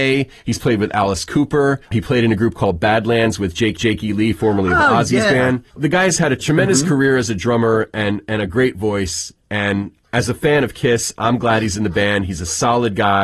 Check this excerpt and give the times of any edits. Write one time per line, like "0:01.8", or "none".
0:01.9
0:03.8